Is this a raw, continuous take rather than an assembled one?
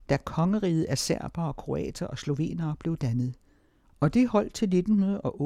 yes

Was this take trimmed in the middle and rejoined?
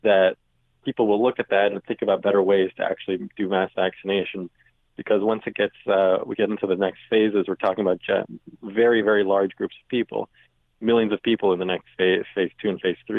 no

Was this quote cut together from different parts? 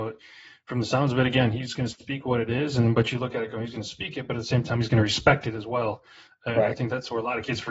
no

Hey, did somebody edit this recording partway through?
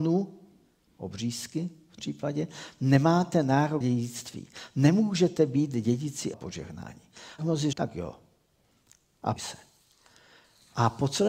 yes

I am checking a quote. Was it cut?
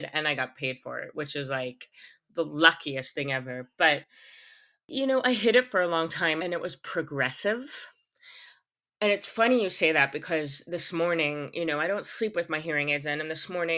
no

